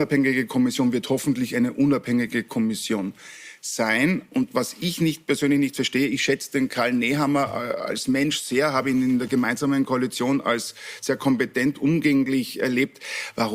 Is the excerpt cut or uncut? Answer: uncut